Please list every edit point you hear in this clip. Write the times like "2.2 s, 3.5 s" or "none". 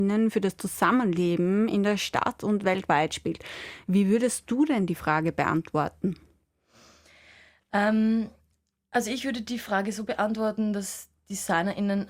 none